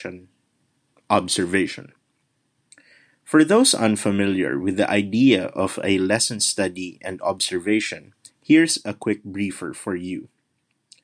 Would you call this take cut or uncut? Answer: cut